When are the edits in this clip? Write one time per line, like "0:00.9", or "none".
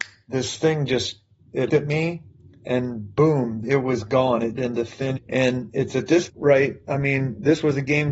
0:01.7
0:03.6
0:04.6
0:05.2
0:06.3